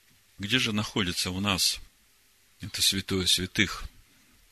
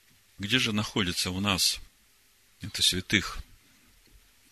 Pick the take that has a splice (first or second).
second